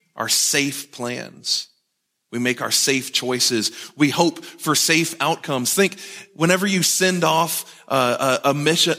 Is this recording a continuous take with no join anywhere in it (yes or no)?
yes